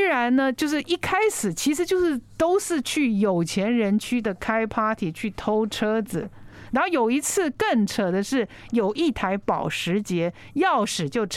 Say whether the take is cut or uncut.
uncut